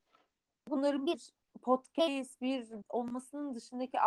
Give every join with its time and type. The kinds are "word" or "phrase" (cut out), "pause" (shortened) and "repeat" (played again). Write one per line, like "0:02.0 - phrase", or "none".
0:01.4 - pause
0:02.8 - word